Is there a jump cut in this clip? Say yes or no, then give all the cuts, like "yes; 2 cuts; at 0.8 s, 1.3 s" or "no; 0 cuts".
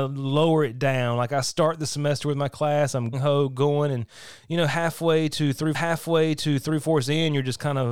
yes; 2 cuts; at 3.1 s, 5.7 s